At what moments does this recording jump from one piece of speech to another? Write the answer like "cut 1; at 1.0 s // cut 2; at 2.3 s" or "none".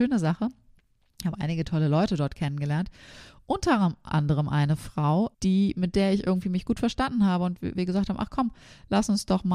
cut 1; at 4.1 s // cut 2; at 5.3 s // cut 3; at 7.8 s

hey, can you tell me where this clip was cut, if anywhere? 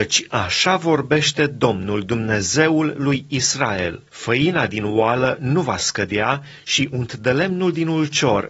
cut 1; at 4.1 s

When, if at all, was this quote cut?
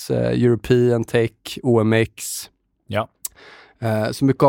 none

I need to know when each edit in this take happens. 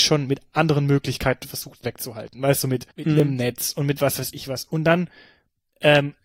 cut 1; at 1.8 s // cut 2; at 2.9 s

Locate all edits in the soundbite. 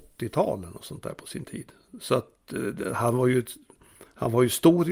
none

